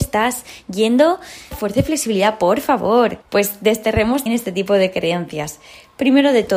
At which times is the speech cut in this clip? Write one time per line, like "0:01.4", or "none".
0:01.5
0:03.2
0:04.3